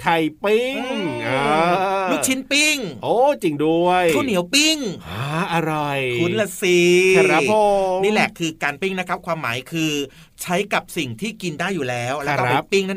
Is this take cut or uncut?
uncut